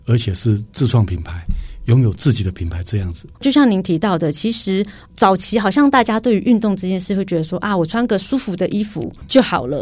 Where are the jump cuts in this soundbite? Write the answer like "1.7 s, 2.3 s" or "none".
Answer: 3.3 s